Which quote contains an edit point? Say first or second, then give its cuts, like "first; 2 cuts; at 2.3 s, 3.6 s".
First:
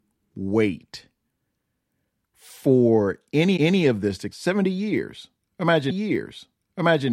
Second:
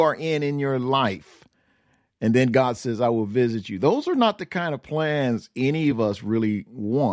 first; 3 cuts; at 3.6 s, 4.3 s, 5.9 s